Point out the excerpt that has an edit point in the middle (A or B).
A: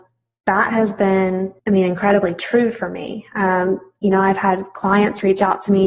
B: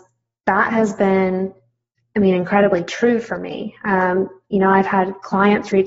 A